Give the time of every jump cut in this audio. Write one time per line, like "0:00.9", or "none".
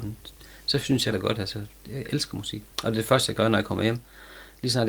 0:01.1
0:02.7